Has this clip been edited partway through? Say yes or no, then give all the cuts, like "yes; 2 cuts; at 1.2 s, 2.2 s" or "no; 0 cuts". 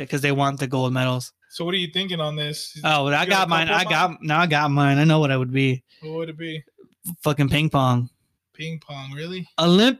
yes; 2 cuts; at 1.4 s, 8.4 s